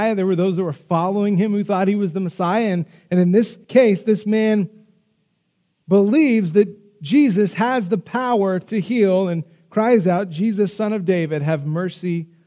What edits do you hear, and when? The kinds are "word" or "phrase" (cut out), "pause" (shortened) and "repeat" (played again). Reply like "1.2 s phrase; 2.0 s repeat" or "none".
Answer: 3.6 s pause